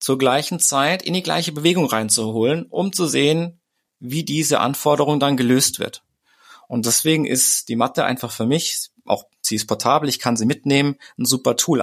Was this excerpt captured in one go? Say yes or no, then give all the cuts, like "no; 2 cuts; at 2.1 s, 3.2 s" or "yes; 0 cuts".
yes; 0 cuts